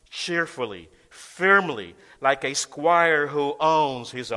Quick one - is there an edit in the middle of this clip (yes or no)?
no